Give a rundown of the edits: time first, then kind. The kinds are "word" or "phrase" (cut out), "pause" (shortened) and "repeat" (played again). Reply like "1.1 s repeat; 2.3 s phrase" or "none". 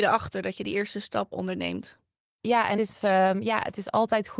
1.3 s word; 2.8 s word